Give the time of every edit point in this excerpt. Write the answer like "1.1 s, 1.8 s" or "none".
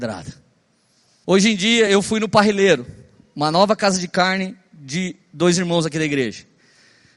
none